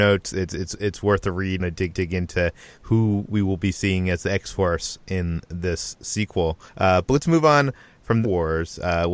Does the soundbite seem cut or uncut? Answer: cut